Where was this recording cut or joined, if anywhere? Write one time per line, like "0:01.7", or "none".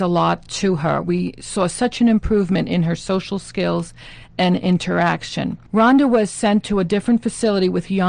0:05.7